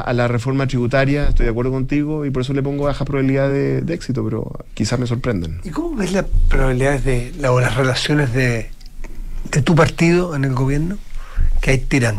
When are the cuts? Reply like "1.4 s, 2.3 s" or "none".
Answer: none